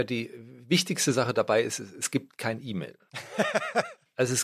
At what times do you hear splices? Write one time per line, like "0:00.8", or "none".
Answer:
none